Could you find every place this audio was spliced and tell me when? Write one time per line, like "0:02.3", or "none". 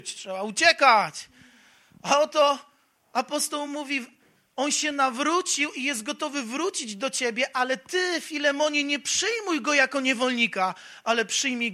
none